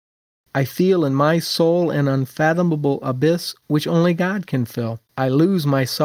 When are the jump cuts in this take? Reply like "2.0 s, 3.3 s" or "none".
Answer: 5.1 s